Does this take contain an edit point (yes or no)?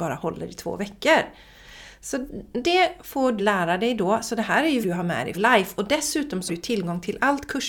yes